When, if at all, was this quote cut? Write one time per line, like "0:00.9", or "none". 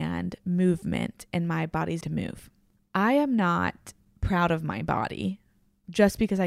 0:02.0